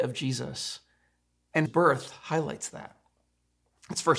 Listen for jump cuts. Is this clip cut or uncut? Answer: cut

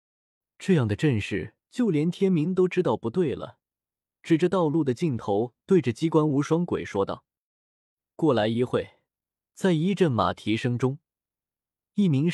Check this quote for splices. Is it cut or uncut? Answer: cut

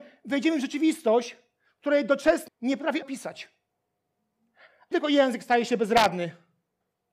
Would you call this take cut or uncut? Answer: cut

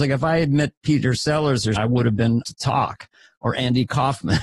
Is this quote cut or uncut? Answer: cut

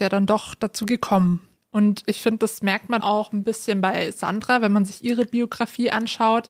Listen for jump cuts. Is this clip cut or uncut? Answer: cut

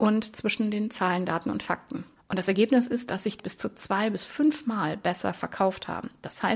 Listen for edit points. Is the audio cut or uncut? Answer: cut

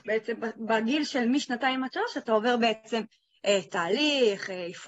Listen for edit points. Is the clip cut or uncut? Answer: uncut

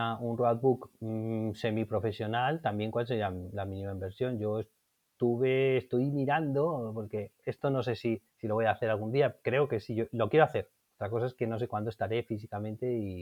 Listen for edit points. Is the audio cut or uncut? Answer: cut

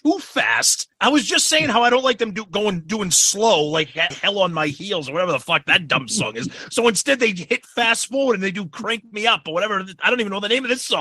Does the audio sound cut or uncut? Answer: cut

